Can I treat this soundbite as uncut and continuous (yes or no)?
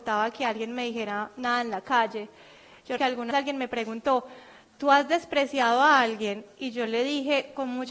no